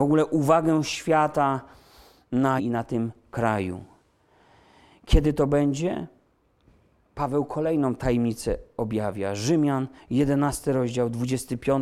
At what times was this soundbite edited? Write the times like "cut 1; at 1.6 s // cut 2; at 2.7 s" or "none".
cut 1; at 2.6 s